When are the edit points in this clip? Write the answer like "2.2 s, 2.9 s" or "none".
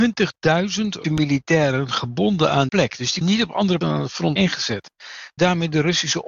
1.0 s, 2.7 s, 3.2 s, 3.8 s, 4.4 s, 5.4 s